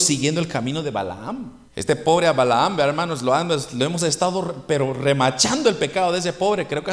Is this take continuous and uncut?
no; 1 cut; at 1.7 s

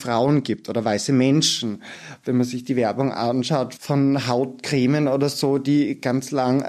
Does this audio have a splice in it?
yes; 1 cut; at 3.8 s

